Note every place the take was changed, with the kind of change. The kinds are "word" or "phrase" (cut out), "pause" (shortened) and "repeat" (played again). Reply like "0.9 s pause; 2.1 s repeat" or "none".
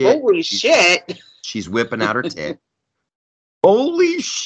none